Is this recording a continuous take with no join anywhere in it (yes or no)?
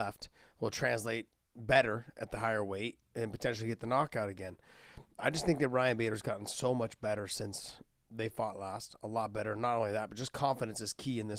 yes